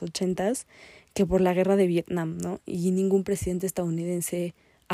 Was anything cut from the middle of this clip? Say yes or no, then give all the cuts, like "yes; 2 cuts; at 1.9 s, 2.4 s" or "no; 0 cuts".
no; 0 cuts